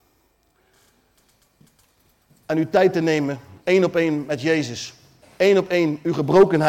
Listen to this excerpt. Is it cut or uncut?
cut